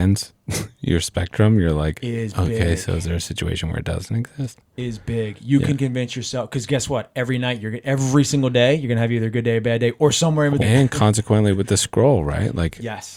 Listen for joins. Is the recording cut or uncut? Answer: cut